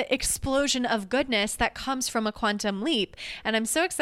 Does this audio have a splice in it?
no; 0 cuts

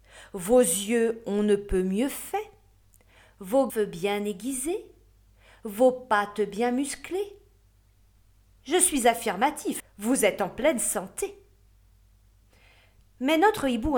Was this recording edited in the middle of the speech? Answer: yes; 2 cuts; at 3.7 s, 9.8 s

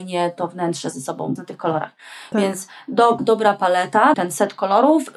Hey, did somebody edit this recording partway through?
yes; 4 cuts; at 0.9 s, 1.4 s, 3.2 s, 4.1 s

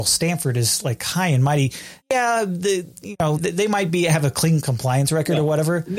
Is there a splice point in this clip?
yes; 2 cuts; at 2.0 s, 3.4 s

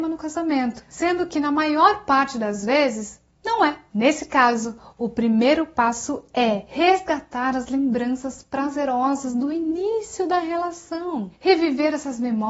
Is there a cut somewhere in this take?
no; 0 cuts

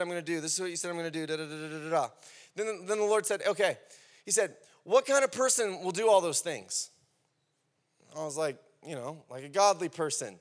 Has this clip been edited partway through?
no; 0 cuts

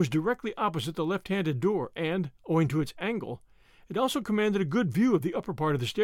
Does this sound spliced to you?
yes; 1 cut; at 2.4 s

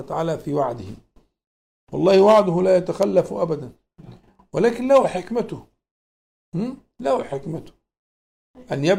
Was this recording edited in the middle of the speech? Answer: no; 0 cuts

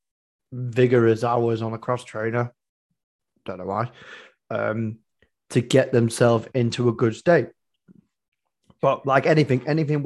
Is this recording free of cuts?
yes; 0 cuts

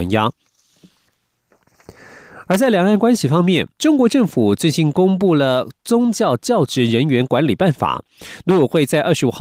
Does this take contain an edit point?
yes; 1 cut; at 3.7 s

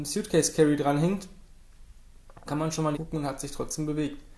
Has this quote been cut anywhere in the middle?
yes; 2 cuts; at 2.5 s, 2.9 s

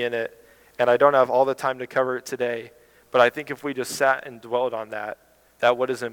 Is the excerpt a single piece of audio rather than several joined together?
yes; 0 cuts

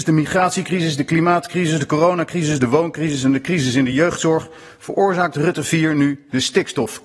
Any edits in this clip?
no; 0 cuts

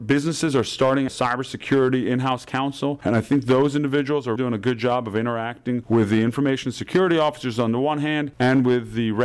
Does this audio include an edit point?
yes; 2 cuts; at 1.1 s, 4.4 s

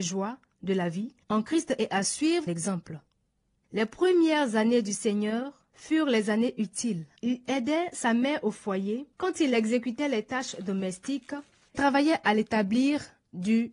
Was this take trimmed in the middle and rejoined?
yes; 6 cuts; at 1.2 s, 2.5 s, 5.7 s, 7.2 s, 9.1 s, 11.7 s

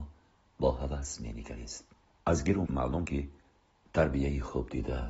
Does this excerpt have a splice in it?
yes; 2 cuts; at 2.6 s, 3.0 s

